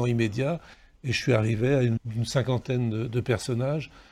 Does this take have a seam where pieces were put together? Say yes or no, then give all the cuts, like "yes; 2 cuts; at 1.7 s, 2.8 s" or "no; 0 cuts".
yes; 1 cut; at 2.0 s